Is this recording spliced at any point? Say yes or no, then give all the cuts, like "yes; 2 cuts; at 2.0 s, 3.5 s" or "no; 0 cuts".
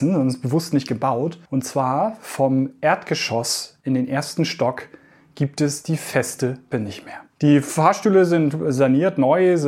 yes; 3 cuts; at 1.5 s, 6.7 s, 7.3 s